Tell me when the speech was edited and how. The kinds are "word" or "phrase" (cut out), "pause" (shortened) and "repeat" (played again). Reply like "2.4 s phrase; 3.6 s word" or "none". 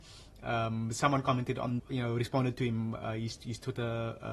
1.8 s word

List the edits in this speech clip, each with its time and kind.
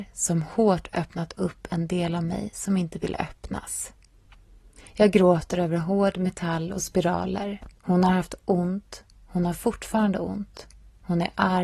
7.8 s pause

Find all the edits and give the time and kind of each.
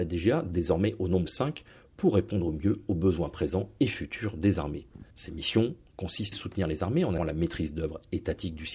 1.3 s word; 5.1 s pause; 6.3 s phrase; 7.2 s word

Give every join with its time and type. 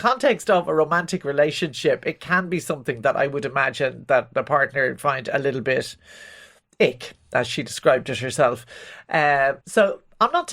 9.6 s pause

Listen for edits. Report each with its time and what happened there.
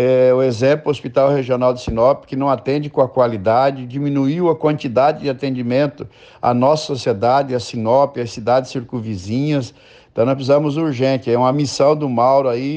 none

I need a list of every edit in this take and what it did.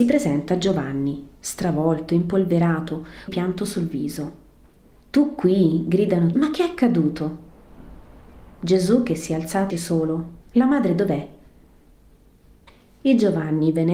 1.4 s pause; 3.3 s phrase; 4.7 s pause; 6.3 s word; 9.7 s word; 10.4 s pause

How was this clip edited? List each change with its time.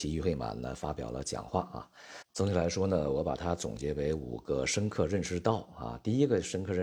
2.3 s pause

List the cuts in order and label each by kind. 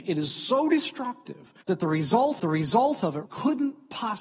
1.6 s pause; 2.4 s repeat; 3.3 s word

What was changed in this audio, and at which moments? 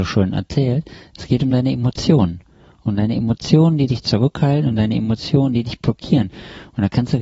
none

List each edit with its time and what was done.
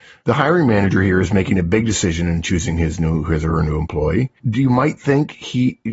4.4 s pause

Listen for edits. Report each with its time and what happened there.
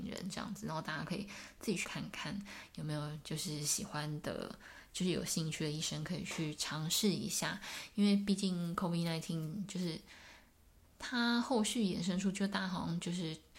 1.8 s word

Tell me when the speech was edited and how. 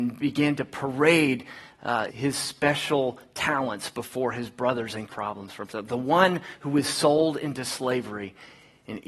2.1 s word; 5.1 s phrase

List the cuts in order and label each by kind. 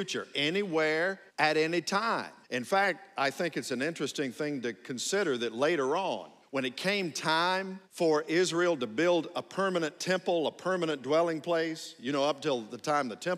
1.3 s pause; 2.4 s pause; 6.4 s pause; 7.8 s pause

